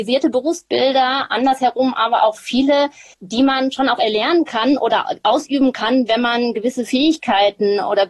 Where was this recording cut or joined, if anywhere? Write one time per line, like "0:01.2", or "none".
0:03.1